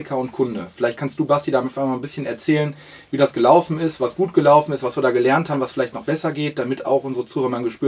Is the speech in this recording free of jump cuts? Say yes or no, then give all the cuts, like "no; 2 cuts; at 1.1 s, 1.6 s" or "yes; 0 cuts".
yes; 0 cuts